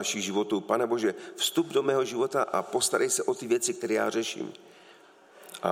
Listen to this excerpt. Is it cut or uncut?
uncut